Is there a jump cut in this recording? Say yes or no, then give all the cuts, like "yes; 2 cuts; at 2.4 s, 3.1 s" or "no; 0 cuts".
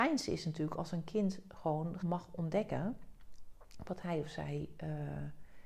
yes; 1 cut; at 2.0 s